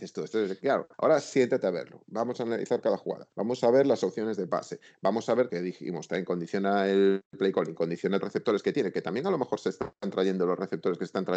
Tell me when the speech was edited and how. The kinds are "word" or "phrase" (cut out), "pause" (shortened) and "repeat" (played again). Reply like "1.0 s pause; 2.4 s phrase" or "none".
0.9 s pause; 3.3 s pause; 5.5 s phrase; 8.2 s phrase

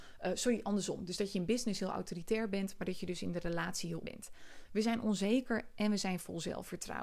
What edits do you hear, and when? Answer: 4.0 s word

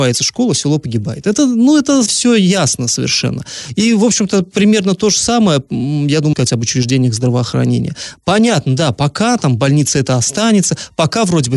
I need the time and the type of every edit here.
2.1 s word; 6.3 s word

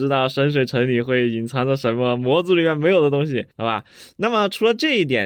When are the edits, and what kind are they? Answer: 3.5 s pause

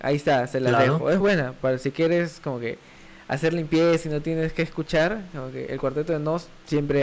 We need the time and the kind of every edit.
1.2 s word

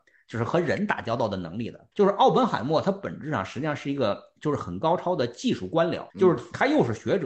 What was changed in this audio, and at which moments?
1.9 s pause; 6.1 s pause

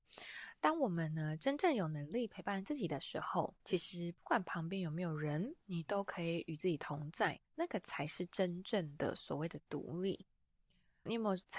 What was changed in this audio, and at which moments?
3.6 s pause; 5.6 s pause; 7.4 s pause

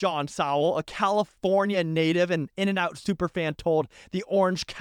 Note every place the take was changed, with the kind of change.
none

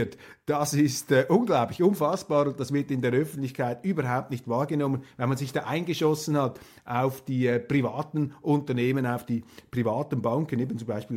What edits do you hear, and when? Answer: none

